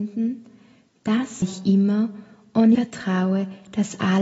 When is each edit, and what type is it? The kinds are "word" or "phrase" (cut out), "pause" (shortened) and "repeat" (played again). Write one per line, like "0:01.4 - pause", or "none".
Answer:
0:01.4 - word
0:02.7 - word